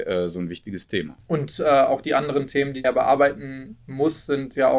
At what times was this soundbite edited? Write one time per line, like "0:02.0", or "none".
0:02.8